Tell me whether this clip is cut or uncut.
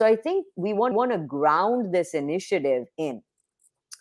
cut